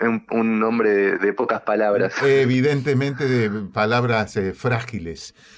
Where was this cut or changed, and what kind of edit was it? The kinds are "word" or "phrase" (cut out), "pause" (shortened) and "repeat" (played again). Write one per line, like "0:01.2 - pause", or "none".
none